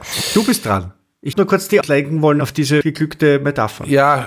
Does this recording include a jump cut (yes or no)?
yes